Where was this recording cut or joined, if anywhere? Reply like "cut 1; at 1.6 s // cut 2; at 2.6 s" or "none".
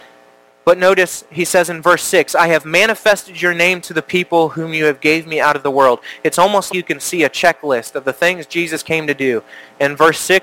cut 1; at 6.7 s